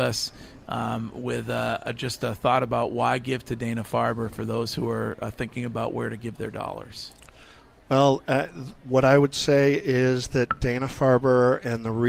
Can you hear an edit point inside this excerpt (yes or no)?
no